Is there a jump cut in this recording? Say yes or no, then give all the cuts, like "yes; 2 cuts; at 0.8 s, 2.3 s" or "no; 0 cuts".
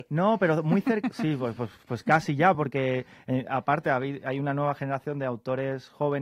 no; 0 cuts